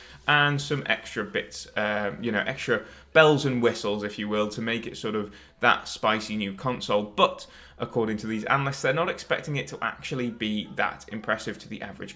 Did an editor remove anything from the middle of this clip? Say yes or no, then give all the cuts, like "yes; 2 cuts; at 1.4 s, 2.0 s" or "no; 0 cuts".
no; 0 cuts